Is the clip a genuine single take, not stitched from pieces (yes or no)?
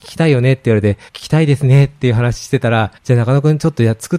no